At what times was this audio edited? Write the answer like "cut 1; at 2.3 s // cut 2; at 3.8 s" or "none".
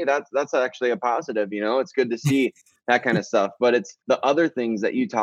cut 1; at 4.0 s